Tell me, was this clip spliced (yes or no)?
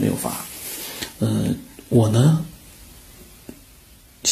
no